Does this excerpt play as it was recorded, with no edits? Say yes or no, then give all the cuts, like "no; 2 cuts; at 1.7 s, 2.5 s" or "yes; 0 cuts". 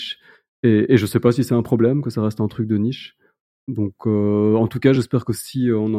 yes; 0 cuts